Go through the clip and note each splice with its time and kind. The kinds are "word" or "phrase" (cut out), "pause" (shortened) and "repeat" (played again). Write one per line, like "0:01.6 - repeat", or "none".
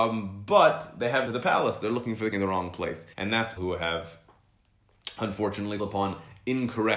0:01.3 - phrase
0:02.3 - word
0:03.1 - pause
0:03.6 - word
0:05.8 - word